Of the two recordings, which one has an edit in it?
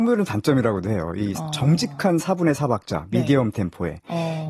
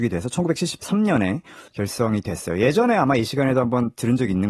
second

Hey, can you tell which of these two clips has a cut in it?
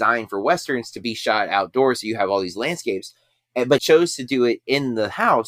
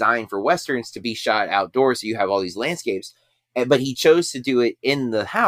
first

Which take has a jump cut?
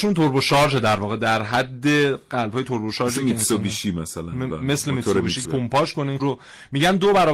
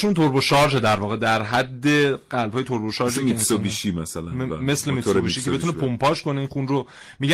first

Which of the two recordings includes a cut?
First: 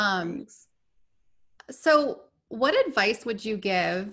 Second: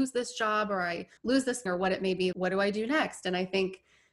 second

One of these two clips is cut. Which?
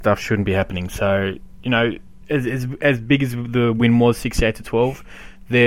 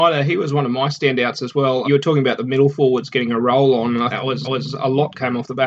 second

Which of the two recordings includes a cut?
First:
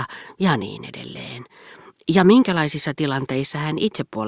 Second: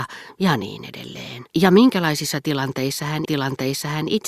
second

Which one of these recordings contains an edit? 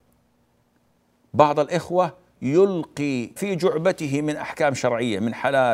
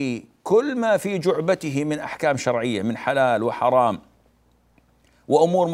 first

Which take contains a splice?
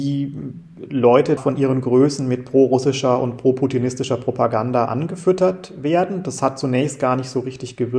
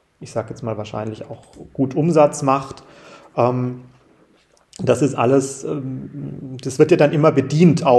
first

